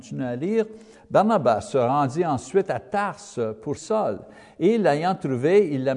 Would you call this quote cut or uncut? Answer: cut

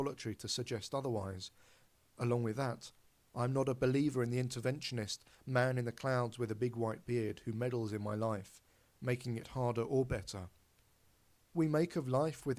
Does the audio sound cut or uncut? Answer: uncut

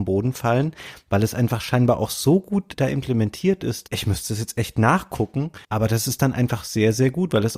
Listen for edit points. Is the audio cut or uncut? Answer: cut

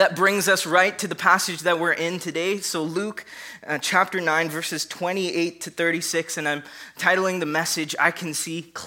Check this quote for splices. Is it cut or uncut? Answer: uncut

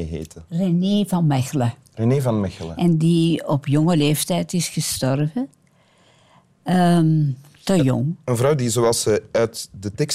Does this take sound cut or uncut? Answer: uncut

